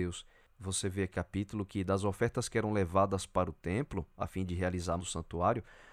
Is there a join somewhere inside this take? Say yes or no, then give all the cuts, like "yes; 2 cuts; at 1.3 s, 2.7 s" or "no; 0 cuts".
yes; 2 cuts; at 1.1 s, 5.0 s